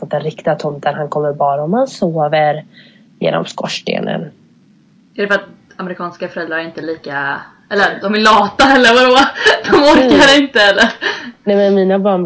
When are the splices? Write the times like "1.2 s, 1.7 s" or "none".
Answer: none

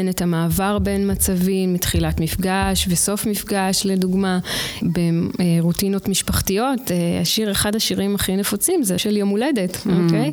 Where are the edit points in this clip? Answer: 9.0 s

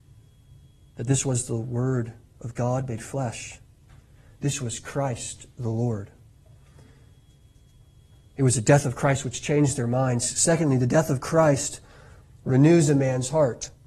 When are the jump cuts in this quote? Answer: none

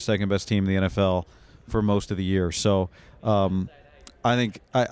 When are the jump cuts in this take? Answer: none

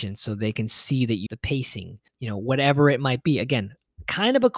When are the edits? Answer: 1.3 s, 2.1 s

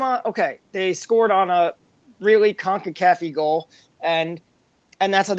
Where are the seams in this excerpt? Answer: none

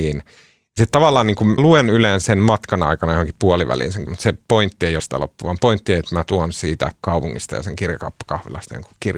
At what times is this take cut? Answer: 1.6 s, 2.2 s, 4.1 s, 5.0 s

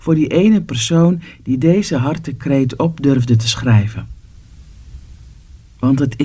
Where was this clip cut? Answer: none

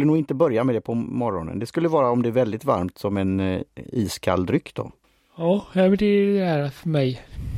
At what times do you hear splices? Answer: none

